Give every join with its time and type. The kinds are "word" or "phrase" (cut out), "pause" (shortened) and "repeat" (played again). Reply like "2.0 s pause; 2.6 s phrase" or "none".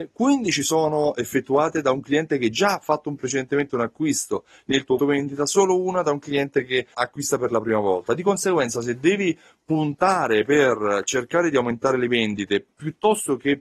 3.2 s word; 5.0 s word; 6.9 s word